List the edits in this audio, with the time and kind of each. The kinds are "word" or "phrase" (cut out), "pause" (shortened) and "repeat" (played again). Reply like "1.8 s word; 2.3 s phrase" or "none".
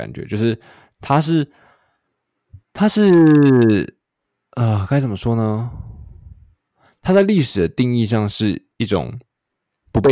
2.6 s pause